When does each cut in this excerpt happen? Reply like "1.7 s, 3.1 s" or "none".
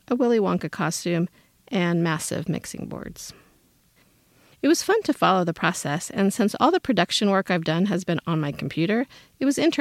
none